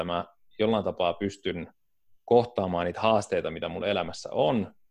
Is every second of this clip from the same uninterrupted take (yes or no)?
yes